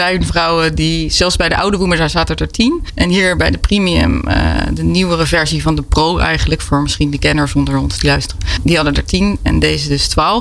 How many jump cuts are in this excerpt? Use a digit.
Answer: 0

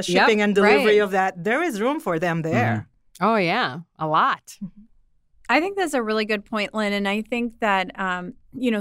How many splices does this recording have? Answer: 0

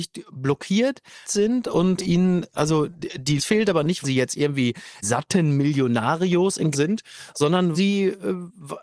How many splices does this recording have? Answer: 7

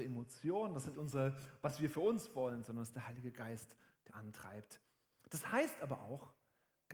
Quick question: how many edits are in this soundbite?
2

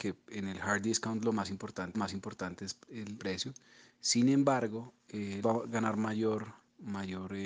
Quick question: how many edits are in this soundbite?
3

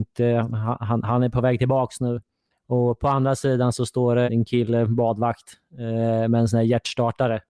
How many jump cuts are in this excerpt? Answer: 2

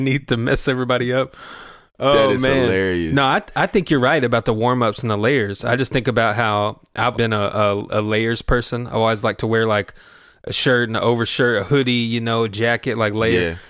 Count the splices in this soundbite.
1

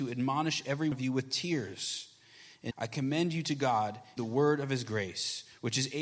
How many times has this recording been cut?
3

